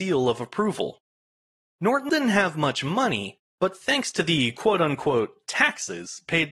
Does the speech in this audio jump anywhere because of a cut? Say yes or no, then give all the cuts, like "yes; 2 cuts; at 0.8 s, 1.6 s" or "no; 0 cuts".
yes; 1 cut; at 2.1 s